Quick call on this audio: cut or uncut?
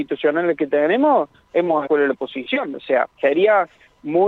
cut